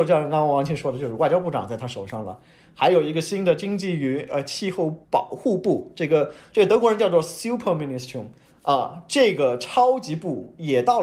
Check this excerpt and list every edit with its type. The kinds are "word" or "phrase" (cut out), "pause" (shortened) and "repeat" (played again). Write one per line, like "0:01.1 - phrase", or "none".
0:05.0 - pause